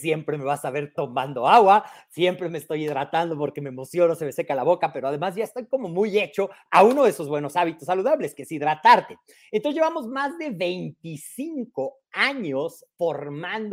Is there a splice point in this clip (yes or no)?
no